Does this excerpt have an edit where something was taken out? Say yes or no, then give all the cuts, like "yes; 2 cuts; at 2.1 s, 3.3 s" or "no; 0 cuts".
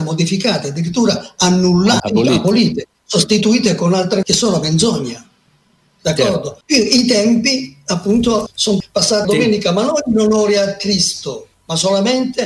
yes; 6 cuts; at 2.0 s, 4.2 s, 6.6 s, 8.5 s, 9.2 s, 11.5 s